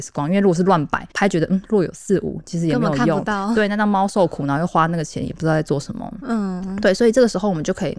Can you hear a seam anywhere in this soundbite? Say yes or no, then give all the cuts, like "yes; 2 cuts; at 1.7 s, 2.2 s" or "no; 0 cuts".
yes; 1 cut; at 1.1 s